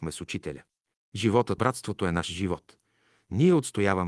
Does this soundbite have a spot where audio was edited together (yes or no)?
yes